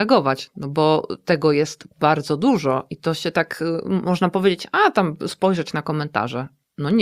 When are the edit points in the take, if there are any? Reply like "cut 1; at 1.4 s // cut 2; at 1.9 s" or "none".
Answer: none